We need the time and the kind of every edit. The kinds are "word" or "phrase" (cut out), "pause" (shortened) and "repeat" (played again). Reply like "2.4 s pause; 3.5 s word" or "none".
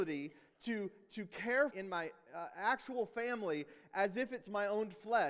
1.7 s phrase